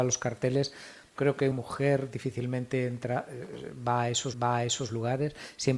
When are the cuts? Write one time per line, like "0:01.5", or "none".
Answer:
0:01.2
0:01.5
0:04.3